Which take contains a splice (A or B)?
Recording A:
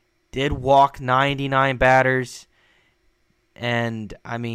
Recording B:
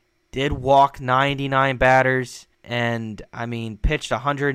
B